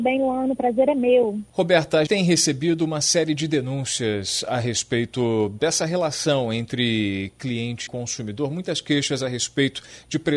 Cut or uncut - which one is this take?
cut